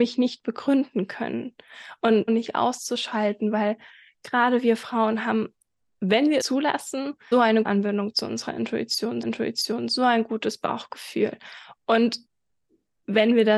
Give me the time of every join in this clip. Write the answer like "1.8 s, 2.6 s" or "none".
2.3 s, 5.8 s, 6.4 s, 7.3 s, 7.6 s, 9.2 s

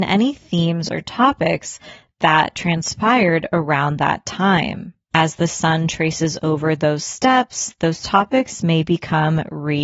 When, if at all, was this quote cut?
none

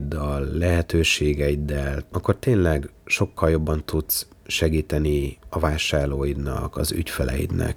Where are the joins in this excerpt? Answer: 2.1 s

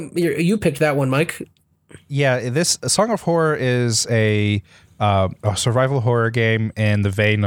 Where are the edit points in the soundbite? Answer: none

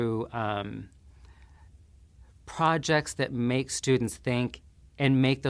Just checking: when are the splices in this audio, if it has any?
none

